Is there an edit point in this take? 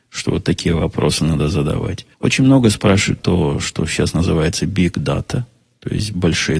yes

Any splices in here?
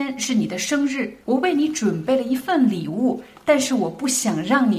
yes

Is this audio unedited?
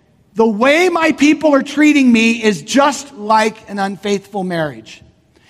yes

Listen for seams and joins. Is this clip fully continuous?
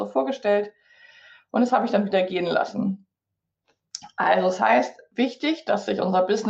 yes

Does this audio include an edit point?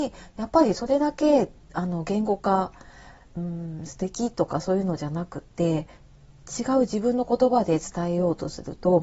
no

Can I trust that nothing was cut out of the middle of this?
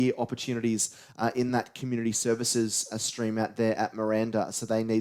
yes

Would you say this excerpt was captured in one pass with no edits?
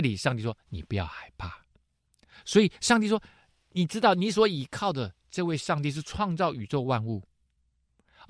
yes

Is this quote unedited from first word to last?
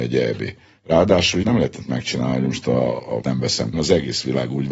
no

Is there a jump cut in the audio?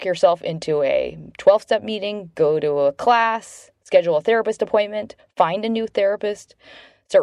no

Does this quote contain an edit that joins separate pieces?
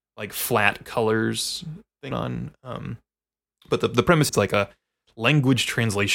yes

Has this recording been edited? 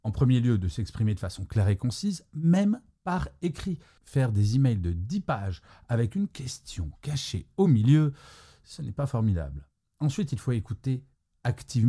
no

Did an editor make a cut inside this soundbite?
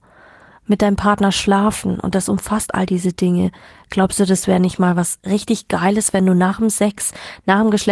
no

